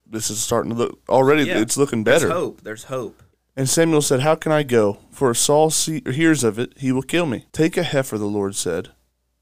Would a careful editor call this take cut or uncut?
cut